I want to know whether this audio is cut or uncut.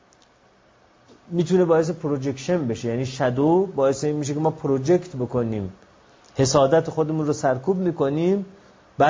uncut